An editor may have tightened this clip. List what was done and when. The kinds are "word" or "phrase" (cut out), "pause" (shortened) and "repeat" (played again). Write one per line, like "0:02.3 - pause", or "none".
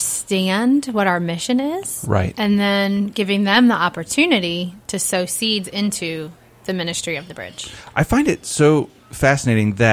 none